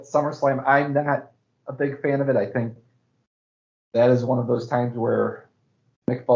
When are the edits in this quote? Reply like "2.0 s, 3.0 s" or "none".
none